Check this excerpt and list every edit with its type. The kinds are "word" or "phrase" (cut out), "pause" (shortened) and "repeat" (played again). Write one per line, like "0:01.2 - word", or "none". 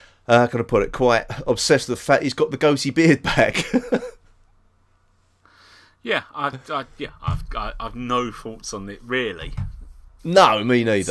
none